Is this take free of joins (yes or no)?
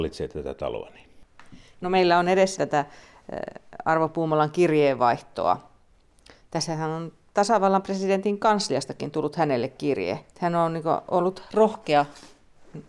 no